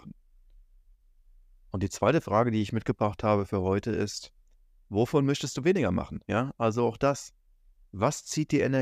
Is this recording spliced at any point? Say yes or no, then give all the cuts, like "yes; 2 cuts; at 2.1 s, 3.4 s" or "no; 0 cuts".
no; 0 cuts